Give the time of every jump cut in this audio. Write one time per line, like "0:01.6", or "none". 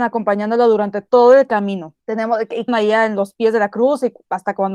0:02.0
0:02.7